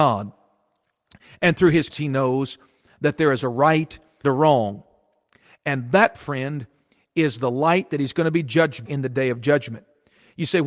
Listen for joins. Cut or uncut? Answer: cut